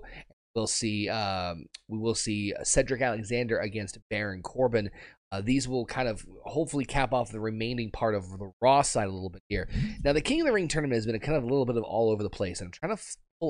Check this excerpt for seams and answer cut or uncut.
uncut